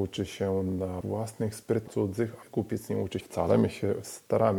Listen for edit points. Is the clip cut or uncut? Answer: cut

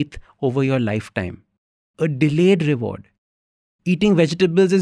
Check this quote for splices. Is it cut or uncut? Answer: uncut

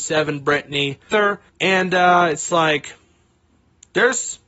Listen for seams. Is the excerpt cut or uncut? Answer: cut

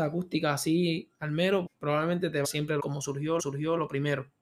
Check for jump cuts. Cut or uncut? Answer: cut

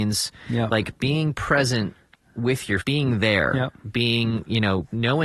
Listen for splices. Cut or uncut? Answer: cut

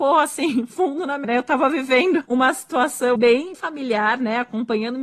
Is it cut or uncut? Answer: cut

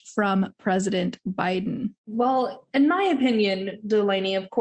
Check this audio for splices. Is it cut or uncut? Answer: cut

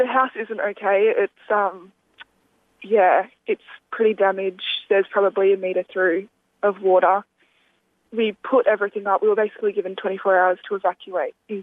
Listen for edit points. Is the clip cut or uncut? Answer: uncut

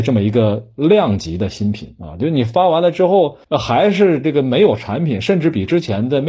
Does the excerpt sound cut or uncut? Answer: cut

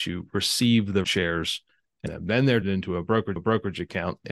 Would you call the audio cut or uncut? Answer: cut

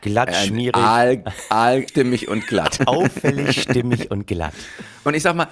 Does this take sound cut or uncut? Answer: cut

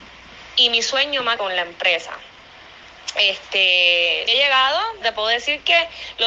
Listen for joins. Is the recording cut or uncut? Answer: cut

